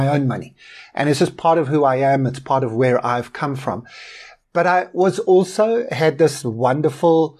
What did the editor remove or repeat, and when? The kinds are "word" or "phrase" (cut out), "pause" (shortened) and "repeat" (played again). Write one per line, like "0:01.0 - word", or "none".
none